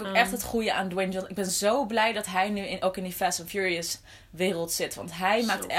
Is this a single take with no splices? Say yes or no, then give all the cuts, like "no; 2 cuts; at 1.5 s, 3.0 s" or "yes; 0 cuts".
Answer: yes; 0 cuts